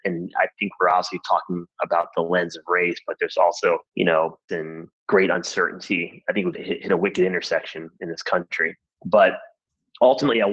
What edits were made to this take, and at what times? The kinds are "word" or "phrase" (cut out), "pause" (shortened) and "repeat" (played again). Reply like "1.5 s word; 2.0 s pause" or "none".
3.9 s pause; 4.5 s word; 4.9 s pause; 6.5 s word